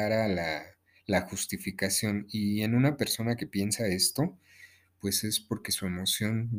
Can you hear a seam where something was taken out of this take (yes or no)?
no